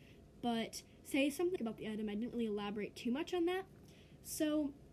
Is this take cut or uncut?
cut